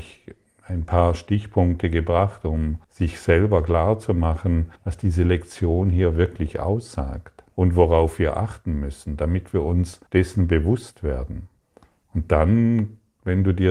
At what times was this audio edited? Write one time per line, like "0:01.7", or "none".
0:02.8
0:04.8
0:07.5
0:10.1
0:11.6